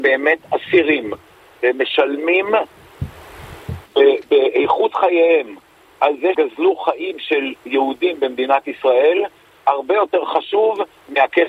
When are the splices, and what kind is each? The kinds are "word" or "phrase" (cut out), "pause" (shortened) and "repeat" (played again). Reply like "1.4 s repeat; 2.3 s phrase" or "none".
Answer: 3.9 s pause; 6.3 s word